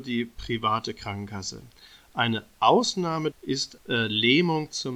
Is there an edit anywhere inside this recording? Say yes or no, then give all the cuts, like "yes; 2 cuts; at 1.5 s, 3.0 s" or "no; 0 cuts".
yes; 2 cuts; at 3.3 s, 3.8 s